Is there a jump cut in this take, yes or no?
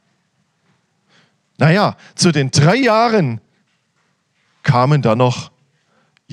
no